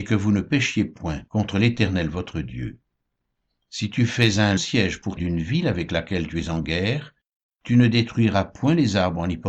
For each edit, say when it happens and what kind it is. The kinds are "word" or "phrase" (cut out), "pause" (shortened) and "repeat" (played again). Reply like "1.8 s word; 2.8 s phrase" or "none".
4.6 s word; 5.2 s word